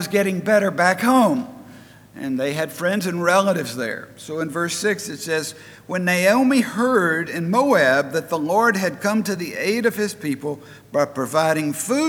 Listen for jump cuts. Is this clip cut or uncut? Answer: uncut